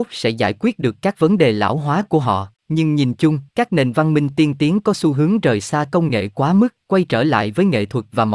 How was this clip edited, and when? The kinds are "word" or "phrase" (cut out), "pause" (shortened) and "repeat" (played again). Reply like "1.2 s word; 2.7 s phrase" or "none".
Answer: 2.6 s pause; 3.5 s pause; 6.8 s pause